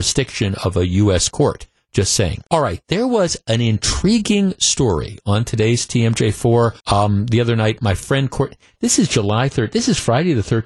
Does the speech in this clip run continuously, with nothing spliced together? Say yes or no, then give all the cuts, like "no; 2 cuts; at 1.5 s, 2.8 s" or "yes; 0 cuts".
no; 2 cuts; at 2.5 s, 6.8 s